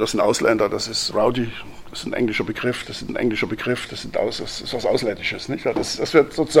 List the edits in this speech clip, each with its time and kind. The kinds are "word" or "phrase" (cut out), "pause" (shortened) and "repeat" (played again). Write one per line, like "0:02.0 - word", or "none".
0:01.1 - word
0:03.1 - repeat